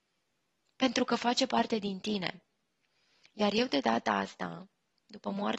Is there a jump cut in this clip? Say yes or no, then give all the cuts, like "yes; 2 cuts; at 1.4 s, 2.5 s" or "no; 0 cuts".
no; 0 cuts